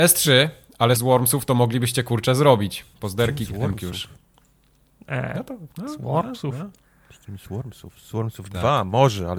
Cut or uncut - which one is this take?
cut